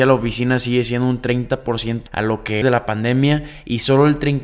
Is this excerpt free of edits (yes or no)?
no